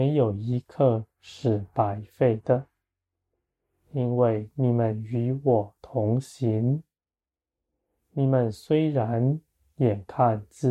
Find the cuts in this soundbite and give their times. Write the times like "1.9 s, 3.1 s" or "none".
none